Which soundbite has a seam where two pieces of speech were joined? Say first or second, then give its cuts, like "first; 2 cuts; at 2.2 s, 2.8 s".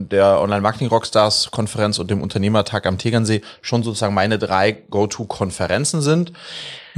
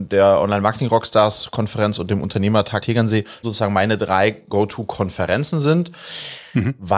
second; 2 cuts; at 2.8 s, 3.4 s